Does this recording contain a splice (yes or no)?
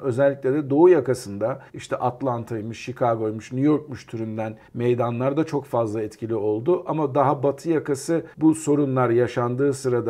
yes